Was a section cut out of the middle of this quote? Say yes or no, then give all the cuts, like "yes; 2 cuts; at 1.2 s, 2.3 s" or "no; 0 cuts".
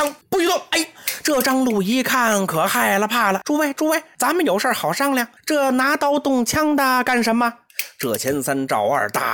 yes; 3 cuts; at 3.4 s, 4.1 s, 5.4 s